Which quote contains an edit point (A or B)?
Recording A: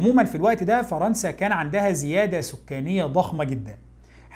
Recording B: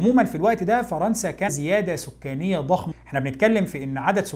B